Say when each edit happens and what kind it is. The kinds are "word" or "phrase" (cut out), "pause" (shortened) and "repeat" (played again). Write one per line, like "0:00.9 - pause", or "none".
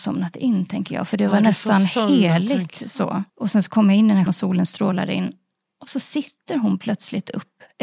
0:03.3 - pause
0:04.3 - word